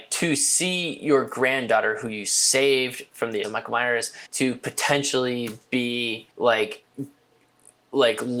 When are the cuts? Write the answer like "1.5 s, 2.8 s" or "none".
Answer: 3.4 s, 4.3 s, 6.3 s